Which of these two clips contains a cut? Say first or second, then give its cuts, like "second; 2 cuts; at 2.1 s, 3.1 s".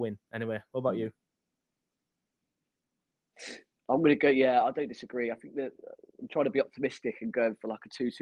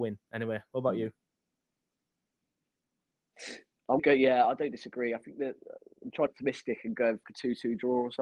second; 3 cuts; at 4.0 s, 6.3 s, 7.2 s